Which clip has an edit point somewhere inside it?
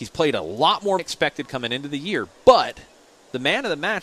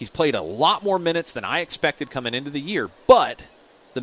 first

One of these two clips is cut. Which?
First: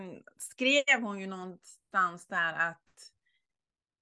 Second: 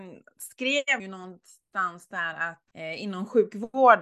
second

